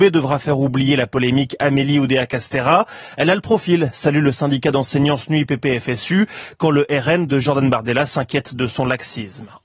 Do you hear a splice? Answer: no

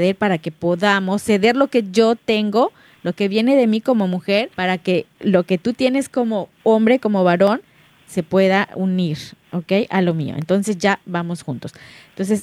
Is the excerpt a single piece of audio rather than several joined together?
no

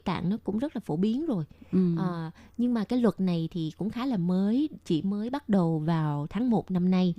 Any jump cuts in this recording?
no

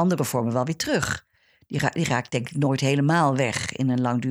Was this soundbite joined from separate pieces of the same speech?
no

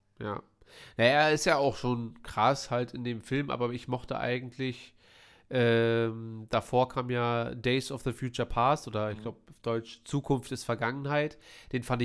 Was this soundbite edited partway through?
no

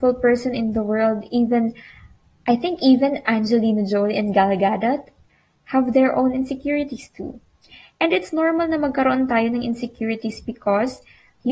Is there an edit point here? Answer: no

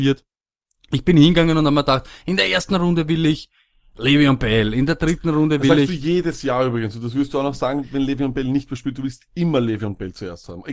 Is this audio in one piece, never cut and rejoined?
yes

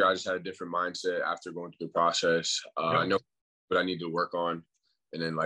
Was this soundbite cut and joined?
no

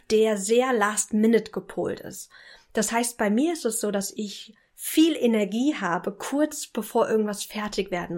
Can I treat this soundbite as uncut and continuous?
yes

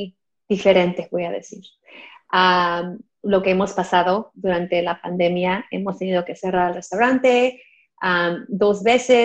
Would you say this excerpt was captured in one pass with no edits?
yes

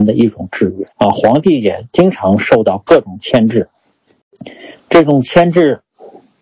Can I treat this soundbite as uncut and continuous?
no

